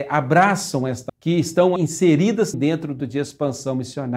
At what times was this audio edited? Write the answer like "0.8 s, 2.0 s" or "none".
1.1 s, 1.8 s, 2.5 s, 3.0 s